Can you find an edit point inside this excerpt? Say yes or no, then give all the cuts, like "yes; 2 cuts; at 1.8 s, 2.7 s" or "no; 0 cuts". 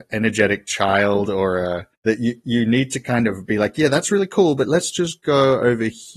yes; 1 cut; at 1.9 s